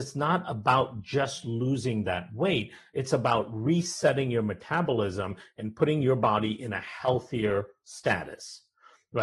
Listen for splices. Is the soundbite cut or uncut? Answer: uncut